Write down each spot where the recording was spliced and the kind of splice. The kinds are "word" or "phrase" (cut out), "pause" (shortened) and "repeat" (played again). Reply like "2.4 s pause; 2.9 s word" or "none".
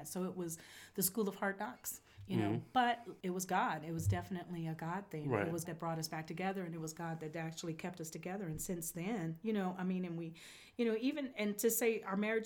5.6 s word